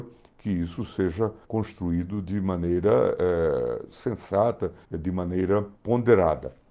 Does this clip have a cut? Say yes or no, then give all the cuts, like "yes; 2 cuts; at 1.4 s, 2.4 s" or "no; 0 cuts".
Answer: yes; 3 cuts; at 1.4 s, 4.8 s, 5.8 s